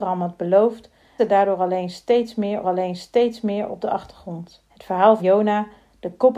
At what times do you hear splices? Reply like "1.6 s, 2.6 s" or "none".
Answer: 1.2 s, 2.6 s, 4.7 s, 5.2 s